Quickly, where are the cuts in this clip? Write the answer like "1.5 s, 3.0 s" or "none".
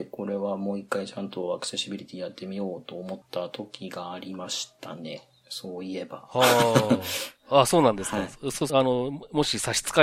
3.2 s, 8.7 s